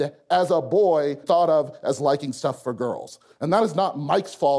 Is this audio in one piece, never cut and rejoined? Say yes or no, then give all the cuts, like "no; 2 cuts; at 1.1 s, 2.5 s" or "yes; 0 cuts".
no; 1 cut; at 1.2 s